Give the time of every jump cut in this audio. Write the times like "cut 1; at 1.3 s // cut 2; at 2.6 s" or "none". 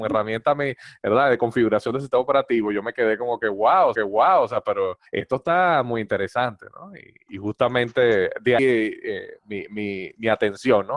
cut 1; at 3.9 s // cut 2; at 5.1 s // cut 3; at 7.3 s // cut 4; at 8.6 s

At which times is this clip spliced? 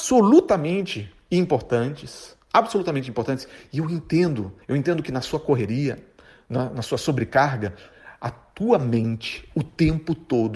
cut 1; at 4.6 s

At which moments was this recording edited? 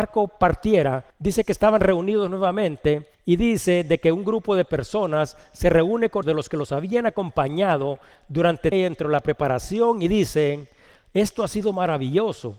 cut 1; at 1.1 s // cut 2; at 3.1 s // cut 3; at 6.2 s // cut 4; at 8.7 s

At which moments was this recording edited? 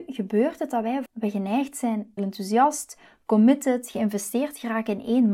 cut 1; at 1.1 s // cut 2; at 2.2 s

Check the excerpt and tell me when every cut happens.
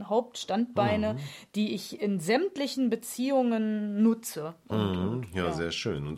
none

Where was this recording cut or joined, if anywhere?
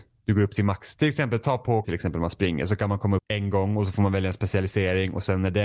cut 1; at 1.8 s // cut 2; at 3.2 s

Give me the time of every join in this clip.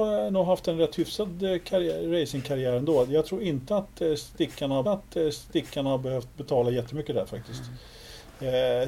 cut 1; at 4.8 s

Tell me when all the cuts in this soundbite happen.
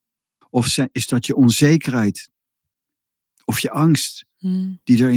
none

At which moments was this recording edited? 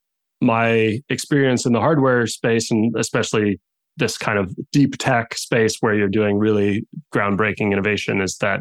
none

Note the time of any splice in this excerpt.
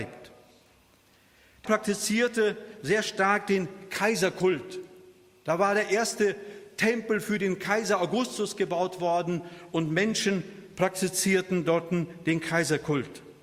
cut 1; at 1.7 s

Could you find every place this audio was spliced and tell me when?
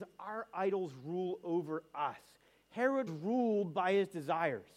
cut 1; at 3.1 s

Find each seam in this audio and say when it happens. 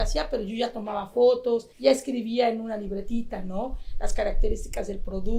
cut 1; at 1.7 s

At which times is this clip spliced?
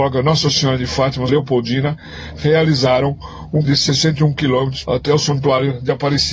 cut 1; at 1.3 s // cut 2; at 3.6 s // cut 3; at 4.8 s

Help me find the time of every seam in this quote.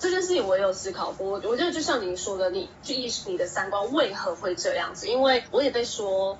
cut 1; at 2.7 s // cut 2; at 5.5 s

